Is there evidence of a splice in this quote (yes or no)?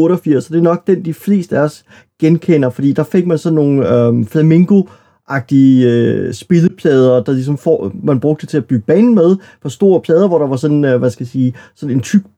no